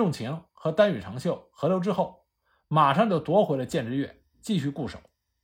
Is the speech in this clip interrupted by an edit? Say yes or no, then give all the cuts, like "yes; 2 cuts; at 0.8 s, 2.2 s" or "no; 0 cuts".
no; 0 cuts